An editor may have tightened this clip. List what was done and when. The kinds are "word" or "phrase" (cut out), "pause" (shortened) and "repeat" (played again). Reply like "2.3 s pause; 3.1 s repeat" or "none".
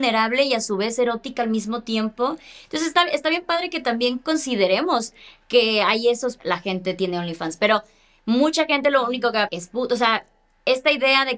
6.4 s word; 9.5 s word